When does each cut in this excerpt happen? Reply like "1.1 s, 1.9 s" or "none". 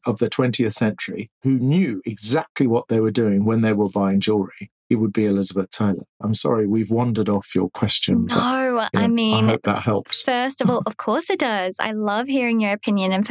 1.3 s, 4.8 s